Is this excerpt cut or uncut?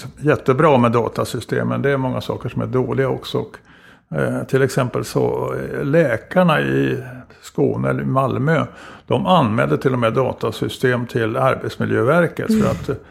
uncut